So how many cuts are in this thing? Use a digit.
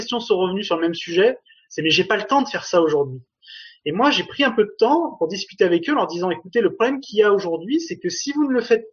0